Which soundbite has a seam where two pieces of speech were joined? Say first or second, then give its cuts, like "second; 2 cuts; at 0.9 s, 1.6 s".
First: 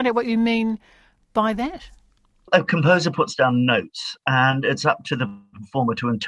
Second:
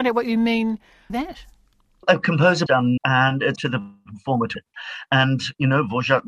second; 5 cuts; at 1.1 s, 2.7 s, 3.0 s, 3.6 s, 4.5 s